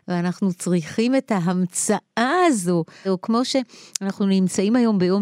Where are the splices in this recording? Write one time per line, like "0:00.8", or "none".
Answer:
0:03.0